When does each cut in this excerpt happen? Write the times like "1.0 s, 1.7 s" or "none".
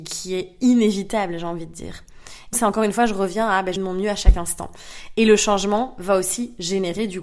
2.5 s, 3.8 s